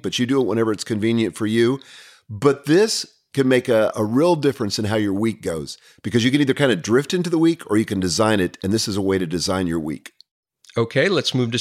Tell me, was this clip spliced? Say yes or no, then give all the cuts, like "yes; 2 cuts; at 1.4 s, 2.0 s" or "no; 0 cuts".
no; 0 cuts